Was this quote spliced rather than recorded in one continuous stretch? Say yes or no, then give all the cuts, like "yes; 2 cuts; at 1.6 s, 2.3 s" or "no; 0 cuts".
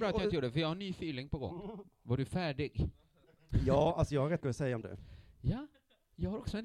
yes; 2 cuts; at 4.4 s, 4.8 s